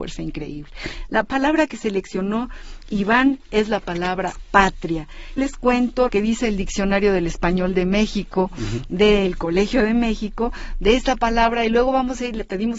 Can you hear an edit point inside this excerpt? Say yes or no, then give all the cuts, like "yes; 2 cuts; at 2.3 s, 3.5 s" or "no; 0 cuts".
yes; 2 cuts; at 5.4 s, 6.1 s